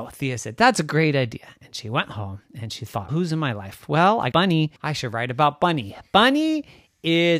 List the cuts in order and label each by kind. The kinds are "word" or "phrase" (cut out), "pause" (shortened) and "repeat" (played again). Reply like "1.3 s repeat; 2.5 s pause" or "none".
3.1 s word; 4.3 s word; 4.8 s pause